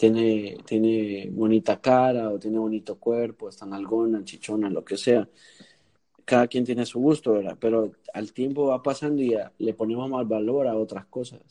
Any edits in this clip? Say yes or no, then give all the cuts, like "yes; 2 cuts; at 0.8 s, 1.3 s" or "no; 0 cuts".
no; 0 cuts